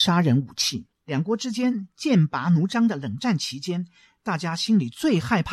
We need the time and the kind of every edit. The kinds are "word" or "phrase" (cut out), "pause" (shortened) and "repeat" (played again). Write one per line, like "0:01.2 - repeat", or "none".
0:00.9 - pause